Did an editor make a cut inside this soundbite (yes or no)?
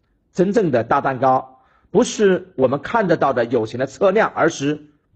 no